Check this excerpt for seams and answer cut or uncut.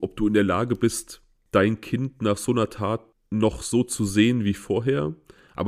uncut